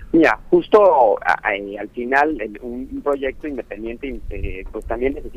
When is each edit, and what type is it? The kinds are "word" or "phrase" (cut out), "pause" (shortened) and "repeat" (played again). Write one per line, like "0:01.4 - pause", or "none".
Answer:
none